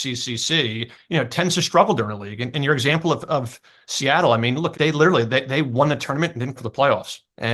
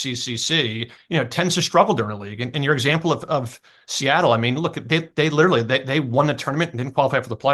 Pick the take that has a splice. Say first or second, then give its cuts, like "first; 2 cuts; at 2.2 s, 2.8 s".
first; 2 cuts; at 4.7 s, 6.6 s